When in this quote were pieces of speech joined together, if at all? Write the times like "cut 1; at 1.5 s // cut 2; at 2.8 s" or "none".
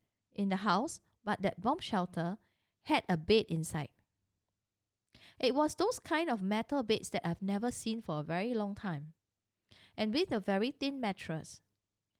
none